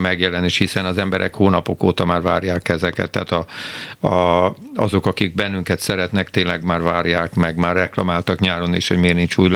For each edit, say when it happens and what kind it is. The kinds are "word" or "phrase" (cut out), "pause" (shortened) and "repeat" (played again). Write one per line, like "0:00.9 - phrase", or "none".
none